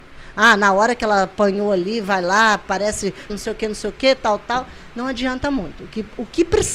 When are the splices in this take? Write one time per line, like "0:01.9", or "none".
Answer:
0:03.3